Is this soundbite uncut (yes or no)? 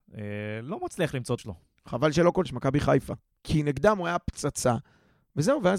no